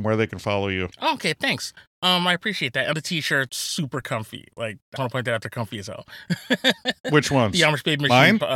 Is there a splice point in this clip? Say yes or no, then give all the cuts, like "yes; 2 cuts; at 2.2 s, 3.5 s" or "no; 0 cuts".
yes; 4 cuts; at 0.9 s, 2.9 s, 3.5 s, 5.0 s